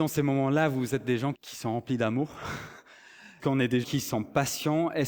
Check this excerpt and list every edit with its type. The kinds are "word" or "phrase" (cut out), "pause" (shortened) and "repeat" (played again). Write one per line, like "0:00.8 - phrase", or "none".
0:01.3 - word
0:03.4 - word
0:03.8 - word